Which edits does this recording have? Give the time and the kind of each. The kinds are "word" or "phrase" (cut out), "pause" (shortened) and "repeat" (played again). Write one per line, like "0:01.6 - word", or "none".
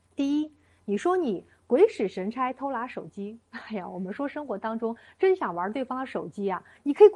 0:03.4 - pause